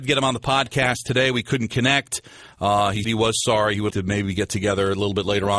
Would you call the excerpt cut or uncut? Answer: cut